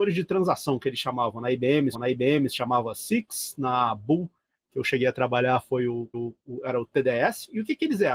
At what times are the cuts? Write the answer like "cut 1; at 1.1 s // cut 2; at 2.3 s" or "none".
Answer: cut 1; at 1.9 s // cut 2; at 6.1 s

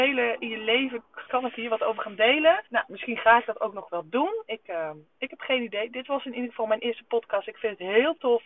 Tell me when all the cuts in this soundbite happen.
cut 1; at 1.3 s // cut 2; at 2.7 s

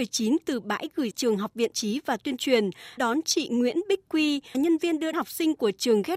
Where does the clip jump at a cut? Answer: cut 1; at 1.1 s // cut 2; at 1.7 s // cut 3; at 3.0 s // cut 4; at 4.5 s // cut 5; at 5.1 s

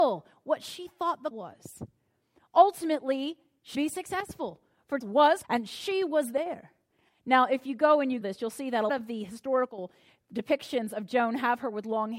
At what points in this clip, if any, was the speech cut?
cut 1; at 1.3 s // cut 2; at 3.7 s // cut 3; at 5.0 s // cut 4; at 5.4 s // cut 5; at 8.2 s // cut 6; at 8.9 s

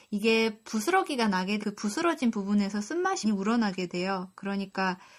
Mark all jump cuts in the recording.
cut 1; at 1.6 s // cut 2; at 3.2 s

